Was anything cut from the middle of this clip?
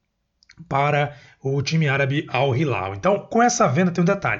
no; 0 cuts

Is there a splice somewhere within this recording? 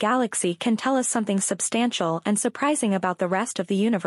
no; 0 cuts

